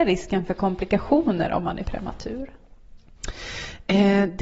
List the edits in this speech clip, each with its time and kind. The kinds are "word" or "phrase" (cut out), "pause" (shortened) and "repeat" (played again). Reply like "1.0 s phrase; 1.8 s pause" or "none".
1.8 s word